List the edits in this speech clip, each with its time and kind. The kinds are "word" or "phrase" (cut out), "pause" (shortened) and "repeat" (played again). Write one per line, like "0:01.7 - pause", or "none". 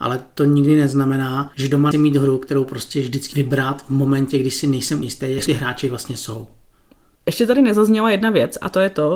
0:01.9 - word
0:03.3 - word
0:05.0 - word
0:05.5 - word